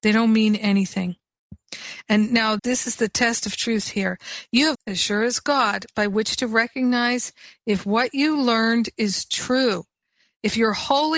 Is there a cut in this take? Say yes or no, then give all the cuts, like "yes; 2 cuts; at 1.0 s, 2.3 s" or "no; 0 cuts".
yes; 2 cuts; at 2.6 s, 4.7 s